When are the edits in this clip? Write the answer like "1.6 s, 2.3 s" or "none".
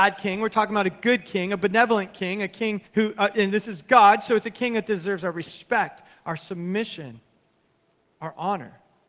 2.9 s